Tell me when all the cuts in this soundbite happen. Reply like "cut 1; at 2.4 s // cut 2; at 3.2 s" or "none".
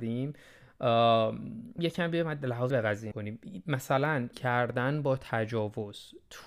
cut 1; at 1.8 s // cut 2; at 2.7 s // cut 3; at 3.1 s // cut 4; at 4.3 s